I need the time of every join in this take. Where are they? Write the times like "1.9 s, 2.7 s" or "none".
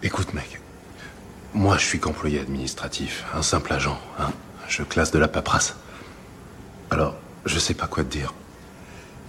none